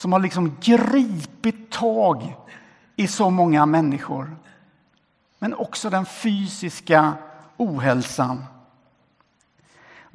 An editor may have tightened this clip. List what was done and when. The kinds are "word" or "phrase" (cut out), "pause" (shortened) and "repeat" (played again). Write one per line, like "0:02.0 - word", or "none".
none